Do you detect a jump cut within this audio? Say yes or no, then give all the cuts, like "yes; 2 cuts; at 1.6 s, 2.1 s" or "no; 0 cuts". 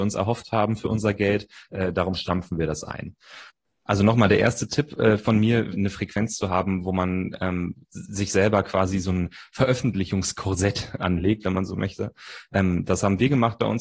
yes; 1 cut; at 5.7 s